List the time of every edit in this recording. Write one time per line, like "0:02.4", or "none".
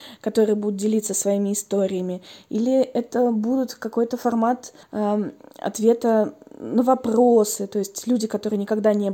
0:04.8